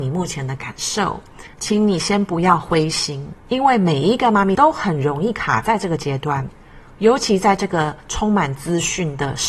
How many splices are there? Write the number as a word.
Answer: three